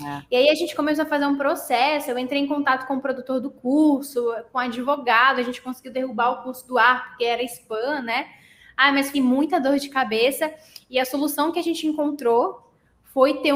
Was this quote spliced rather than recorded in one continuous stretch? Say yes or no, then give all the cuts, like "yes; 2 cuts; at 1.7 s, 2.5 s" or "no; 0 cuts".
yes; 1 cut; at 9.1 s